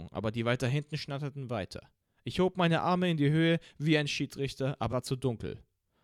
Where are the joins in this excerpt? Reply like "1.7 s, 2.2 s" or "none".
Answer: 4.9 s